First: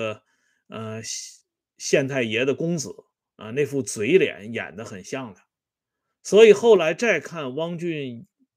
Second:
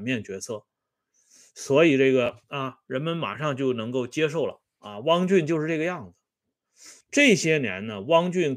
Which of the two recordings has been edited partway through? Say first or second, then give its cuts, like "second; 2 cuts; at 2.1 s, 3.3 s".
second; 2 cuts; at 2.4 s, 7.0 s